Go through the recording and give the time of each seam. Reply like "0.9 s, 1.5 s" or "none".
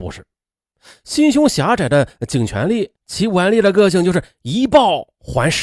none

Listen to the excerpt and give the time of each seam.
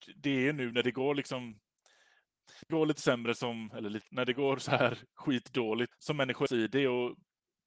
2.7 s, 4.1 s, 5.9 s, 6.5 s

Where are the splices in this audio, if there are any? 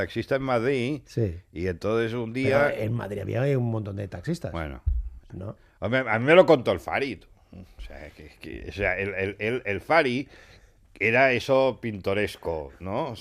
none

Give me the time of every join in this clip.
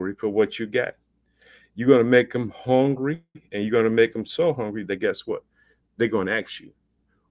none

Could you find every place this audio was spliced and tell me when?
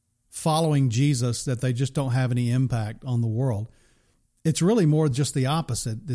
none

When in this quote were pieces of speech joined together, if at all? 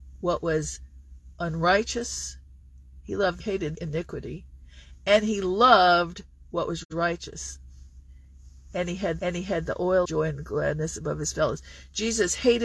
3.4 s, 3.7 s, 9.2 s, 10.0 s

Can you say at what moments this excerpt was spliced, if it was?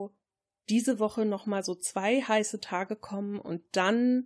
none

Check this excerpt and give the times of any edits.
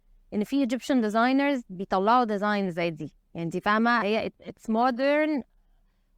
1.7 s, 4.0 s, 4.4 s

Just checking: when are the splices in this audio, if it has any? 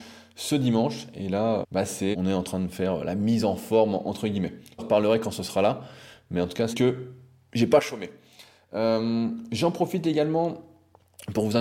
1.6 s, 2.1 s, 4.8 s, 6.7 s

